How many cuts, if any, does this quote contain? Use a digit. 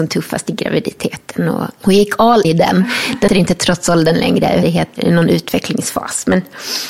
5